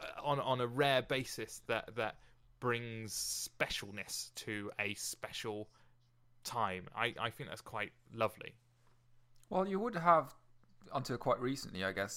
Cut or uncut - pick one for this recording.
uncut